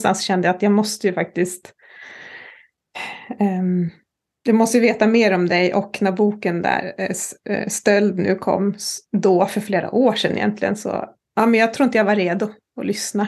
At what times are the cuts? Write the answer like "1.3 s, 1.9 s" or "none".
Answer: none